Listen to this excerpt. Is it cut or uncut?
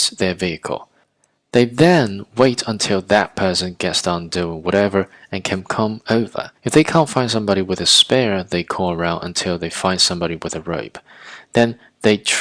cut